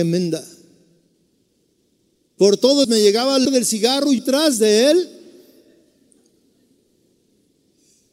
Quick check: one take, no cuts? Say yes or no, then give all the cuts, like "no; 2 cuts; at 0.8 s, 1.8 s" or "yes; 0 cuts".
no; 3 cuts; at 2.8 s, 3.5 s, 4.2 s